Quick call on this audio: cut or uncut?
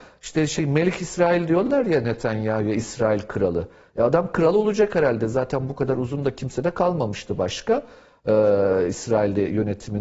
uncut